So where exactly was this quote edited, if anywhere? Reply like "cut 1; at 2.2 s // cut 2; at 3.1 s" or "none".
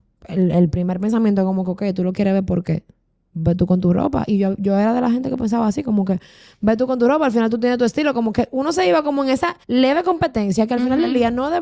cut 1; at 9.6 s